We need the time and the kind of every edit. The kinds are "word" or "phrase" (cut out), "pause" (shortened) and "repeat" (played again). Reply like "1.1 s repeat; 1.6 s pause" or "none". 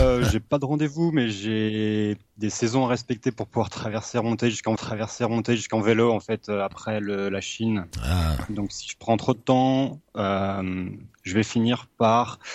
4.8 s repeat; 7.9 s pause

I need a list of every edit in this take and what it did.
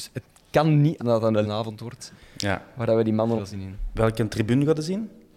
1.0 s word; 1.4 s word; 3.4 s phrase

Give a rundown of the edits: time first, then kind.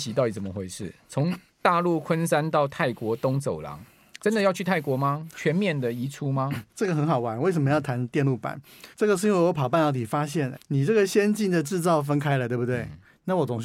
6.7 s pause; 8.9 s pause; 10.5 s word

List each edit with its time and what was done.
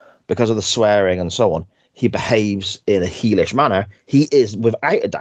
none

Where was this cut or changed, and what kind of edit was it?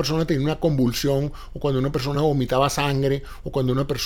none

